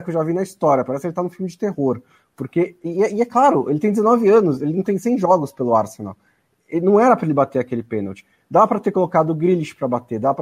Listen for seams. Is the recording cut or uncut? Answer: uncut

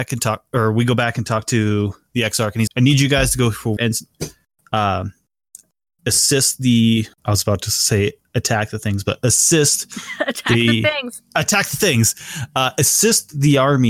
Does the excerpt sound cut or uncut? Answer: cut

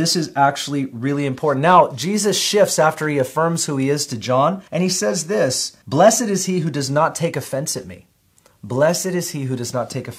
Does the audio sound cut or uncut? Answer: cut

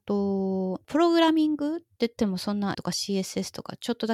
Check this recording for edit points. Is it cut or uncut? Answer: cut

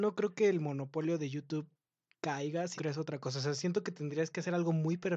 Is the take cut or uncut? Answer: cut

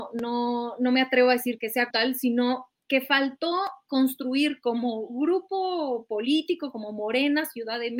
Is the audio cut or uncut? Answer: cut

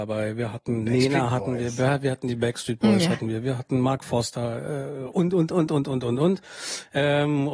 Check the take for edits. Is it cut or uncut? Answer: uncut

